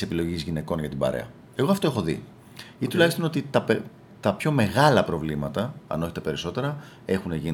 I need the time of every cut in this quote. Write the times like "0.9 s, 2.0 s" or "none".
none